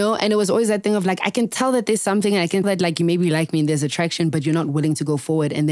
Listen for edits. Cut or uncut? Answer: cut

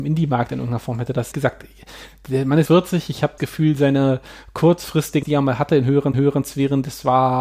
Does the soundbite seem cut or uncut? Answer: cut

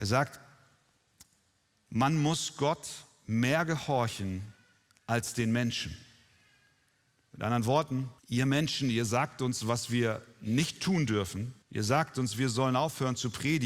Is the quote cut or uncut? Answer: cut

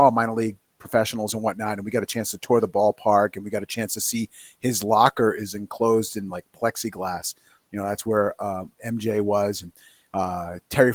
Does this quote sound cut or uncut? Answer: uncut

